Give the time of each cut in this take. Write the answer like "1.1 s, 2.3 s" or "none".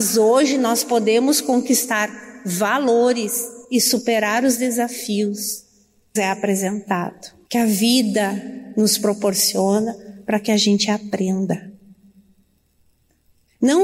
3.6 s, 6.2 s, 7.5 s